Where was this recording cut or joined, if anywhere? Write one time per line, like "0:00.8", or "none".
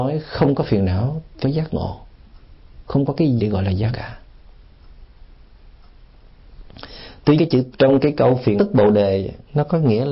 0:01.4
0:03.4
0:03.9
0:07.4
0:07.7
0:08.6